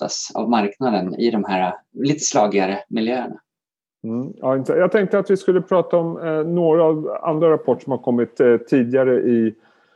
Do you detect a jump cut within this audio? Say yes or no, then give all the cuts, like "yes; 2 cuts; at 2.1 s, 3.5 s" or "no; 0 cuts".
no; 0 cuts